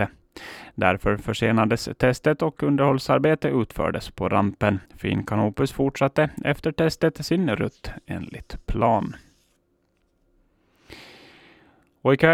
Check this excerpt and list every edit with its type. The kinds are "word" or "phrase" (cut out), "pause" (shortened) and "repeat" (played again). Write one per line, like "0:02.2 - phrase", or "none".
0:04.9 - pause